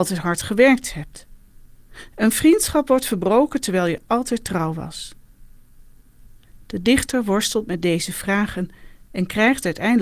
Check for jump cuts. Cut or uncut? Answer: uncut